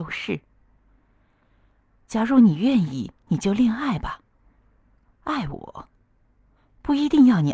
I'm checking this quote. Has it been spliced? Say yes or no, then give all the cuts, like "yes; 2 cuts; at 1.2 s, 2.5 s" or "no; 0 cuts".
yes; 1 cut; at 3.2 s